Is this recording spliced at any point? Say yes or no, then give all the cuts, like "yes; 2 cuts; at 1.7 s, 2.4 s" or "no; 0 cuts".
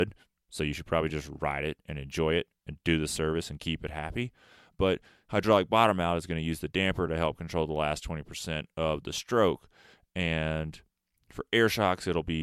no; 0 cuts